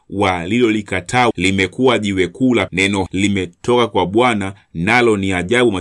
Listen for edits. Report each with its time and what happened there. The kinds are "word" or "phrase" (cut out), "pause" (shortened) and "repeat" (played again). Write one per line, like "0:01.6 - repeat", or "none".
0:01.3 - word
0:02.7 - word
0:03.1 - word